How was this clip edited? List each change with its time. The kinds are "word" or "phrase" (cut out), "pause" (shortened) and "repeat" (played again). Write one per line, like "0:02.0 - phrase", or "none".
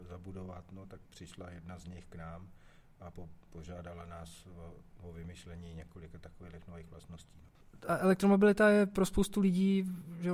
none